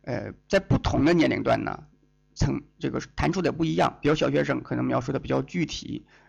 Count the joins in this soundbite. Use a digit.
0